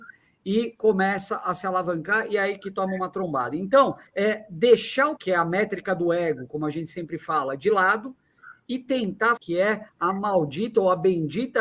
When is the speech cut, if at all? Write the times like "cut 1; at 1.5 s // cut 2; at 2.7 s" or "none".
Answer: cut 1; at 4.1 s // cut 2; at 5.2 s // cut 3; at 9.4 s // cut 4; at 9.9 s